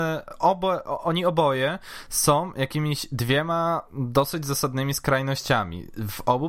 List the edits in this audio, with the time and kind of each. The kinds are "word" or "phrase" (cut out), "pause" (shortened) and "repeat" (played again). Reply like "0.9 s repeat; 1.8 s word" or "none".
none